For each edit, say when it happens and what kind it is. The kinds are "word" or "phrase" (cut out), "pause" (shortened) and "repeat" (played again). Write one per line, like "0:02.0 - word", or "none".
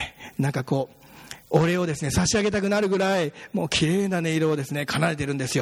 0:01.4 - pause